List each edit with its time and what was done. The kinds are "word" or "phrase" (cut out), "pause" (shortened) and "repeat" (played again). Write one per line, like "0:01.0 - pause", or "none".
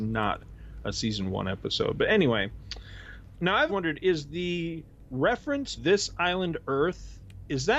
0:03.3 - word
0:03.7 - word
0:05.8 - word